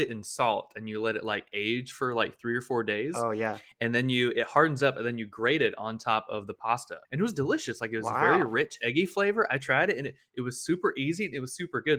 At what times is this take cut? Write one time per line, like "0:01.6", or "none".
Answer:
0:07.0